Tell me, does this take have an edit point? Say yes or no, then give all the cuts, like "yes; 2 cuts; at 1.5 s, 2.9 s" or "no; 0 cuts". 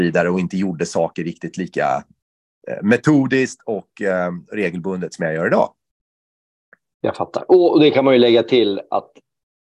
no; 0 cuts